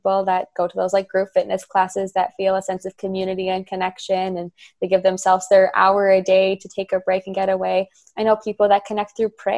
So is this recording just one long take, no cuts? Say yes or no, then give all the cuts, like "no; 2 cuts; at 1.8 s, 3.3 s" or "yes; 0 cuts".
yes; 0 cuts